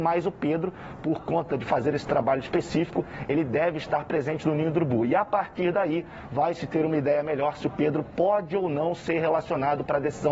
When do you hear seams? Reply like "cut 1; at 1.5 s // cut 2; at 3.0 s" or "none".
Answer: none